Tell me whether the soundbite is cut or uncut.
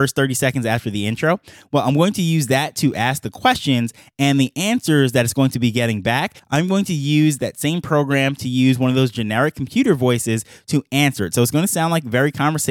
uncut